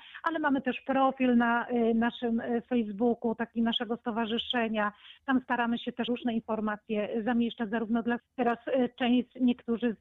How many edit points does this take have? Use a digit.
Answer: 2